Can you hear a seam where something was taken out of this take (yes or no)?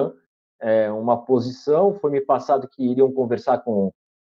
no